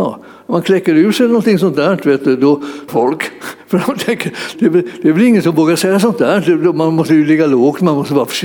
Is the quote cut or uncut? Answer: cut